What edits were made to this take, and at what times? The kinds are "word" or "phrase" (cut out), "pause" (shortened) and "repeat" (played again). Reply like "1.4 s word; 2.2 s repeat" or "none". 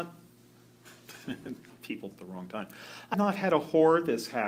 2.1 s word; 3.1 s word